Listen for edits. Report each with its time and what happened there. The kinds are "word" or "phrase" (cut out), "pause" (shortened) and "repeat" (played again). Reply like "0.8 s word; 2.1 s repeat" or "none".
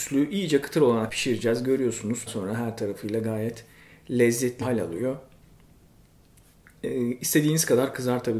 1.1 s word; 2.3 s word; 4.6 s word